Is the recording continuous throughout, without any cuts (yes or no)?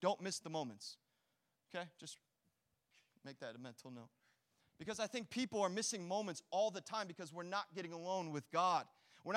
yes